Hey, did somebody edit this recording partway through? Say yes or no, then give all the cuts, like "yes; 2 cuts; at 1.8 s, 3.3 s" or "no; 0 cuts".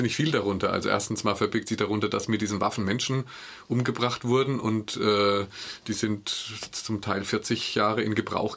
no; 0 cuts